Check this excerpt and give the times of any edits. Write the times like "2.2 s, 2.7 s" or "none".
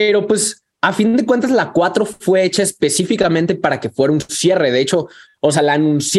none